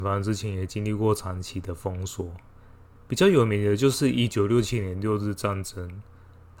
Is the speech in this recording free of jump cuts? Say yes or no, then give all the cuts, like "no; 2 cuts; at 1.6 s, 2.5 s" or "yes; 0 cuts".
yes; 0 cuts